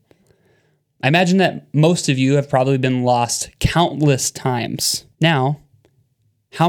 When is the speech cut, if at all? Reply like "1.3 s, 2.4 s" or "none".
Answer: 5.1 s

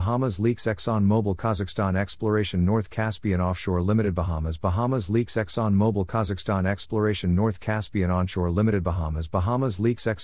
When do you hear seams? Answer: none

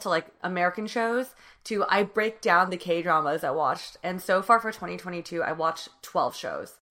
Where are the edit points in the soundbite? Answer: none

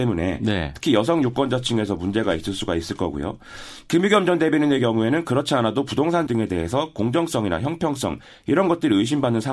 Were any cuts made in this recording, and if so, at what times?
6.3 s

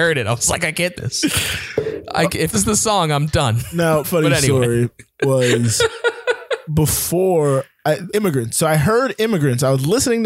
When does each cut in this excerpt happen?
0.9 s, 2.5 s, 4.0 s, 6.7 s, 8.1 s

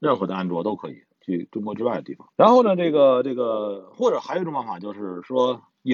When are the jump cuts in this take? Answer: 2.3 s

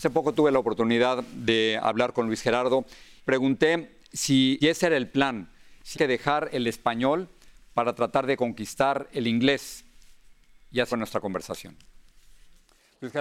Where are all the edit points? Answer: 3.3 s, 4.6 s, 5.9 s, 10.9 s

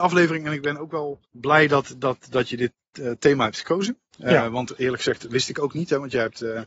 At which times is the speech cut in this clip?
1.3 s

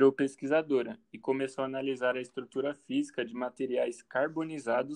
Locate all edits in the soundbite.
none

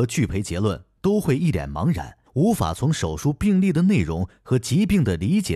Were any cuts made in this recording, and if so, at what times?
2.3 s

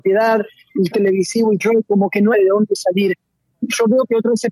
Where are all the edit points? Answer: 0.9 s, 1.6 s, 2.3 s

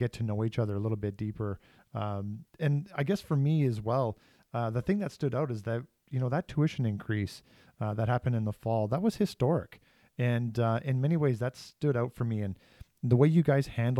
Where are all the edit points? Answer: none

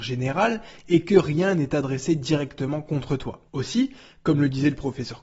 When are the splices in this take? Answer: 3.5 s

